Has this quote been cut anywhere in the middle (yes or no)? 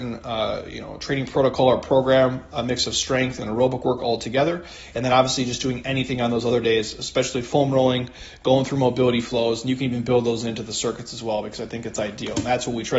no